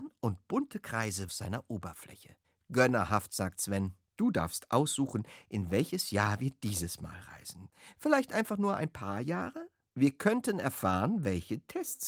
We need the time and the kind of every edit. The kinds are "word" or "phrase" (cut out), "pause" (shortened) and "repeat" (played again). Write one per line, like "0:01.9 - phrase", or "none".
0:01.3 - phrase
0:02.4 - pause
0:04.1 - pause